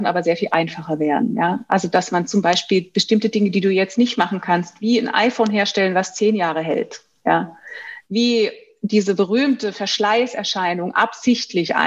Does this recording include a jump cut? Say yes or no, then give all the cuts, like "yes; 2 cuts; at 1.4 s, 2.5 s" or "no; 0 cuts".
no; 0 cuts